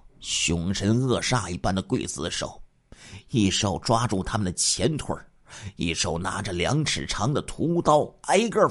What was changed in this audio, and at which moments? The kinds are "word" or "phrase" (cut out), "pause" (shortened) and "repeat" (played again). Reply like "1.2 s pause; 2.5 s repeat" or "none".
none